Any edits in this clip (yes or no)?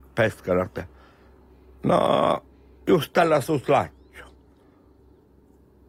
no